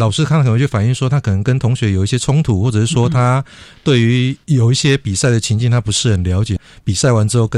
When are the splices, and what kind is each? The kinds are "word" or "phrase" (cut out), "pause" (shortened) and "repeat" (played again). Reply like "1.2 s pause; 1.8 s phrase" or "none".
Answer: 4.4 s pause